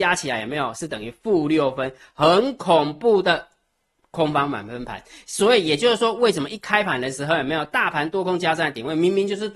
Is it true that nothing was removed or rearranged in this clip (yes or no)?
yes